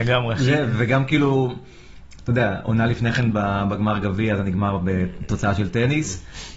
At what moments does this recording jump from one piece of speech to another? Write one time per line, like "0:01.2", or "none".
none